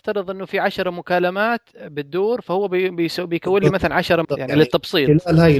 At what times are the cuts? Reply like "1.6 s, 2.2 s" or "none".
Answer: 4.2 s